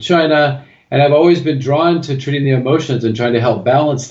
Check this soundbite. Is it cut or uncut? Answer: uncut